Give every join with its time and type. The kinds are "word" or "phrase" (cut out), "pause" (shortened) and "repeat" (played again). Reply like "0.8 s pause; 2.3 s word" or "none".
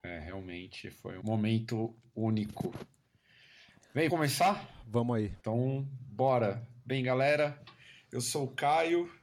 1.2 s word; 4.1 s word; 5.4 s pause